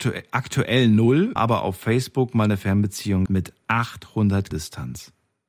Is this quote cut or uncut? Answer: cut